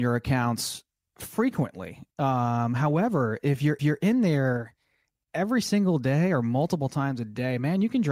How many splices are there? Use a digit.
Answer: 1